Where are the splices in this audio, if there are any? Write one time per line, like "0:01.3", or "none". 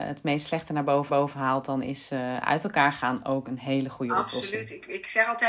0:01.1